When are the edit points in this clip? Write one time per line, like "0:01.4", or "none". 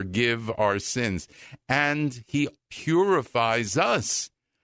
0:02.5